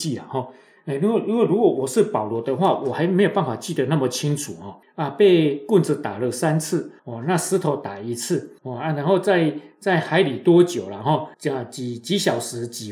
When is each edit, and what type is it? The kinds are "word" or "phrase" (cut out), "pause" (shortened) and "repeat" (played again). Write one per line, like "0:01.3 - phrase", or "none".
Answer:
0:04.8 - pause
0:07.0 - pause
0:08.6 - pause
0:11.3 - pause